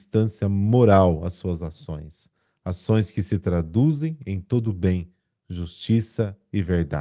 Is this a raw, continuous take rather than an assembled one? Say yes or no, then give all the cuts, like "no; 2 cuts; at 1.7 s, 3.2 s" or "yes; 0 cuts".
yes; 0 cuts